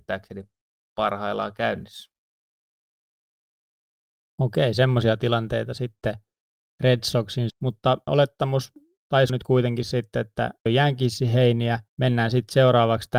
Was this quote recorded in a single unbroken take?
no; 5 cuts; at 7.5 s, 8.1 s, 9.3 s, 10.7 s, 11.9 s

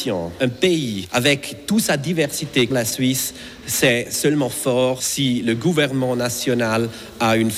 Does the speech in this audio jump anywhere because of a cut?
yes; 1 cut; at 2.7 s

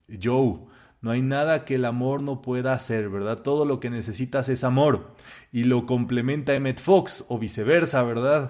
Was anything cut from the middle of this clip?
no; 0 cuts

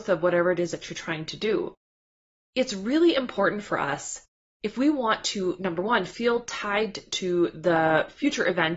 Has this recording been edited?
no; 0 cuts

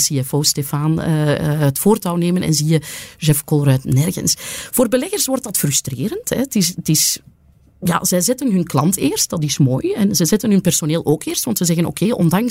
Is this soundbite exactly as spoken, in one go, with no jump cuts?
yes; 0 cuts

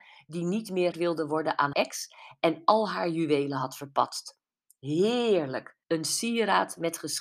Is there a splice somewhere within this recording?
yes; 3 cuts; at 0.9 s, 1.7 s, 5.8 s

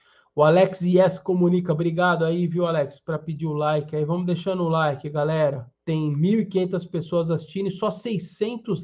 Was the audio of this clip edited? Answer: yes; 1 cut; at 5.7 s

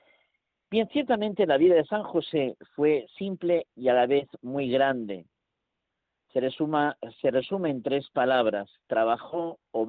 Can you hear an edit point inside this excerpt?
no; 0 cuts

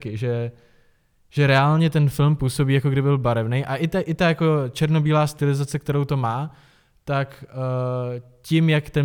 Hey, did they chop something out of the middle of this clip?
no; 0 cuts

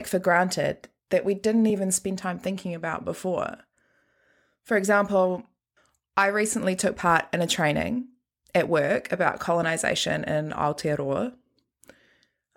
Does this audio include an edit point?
no; 0 cuts

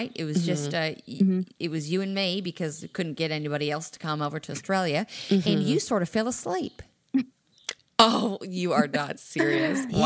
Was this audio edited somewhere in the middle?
no; 0 cuts

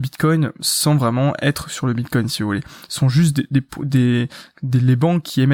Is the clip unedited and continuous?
yes; 0 cuts

